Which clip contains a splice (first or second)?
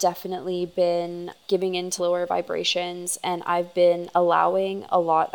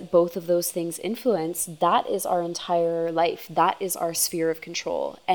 first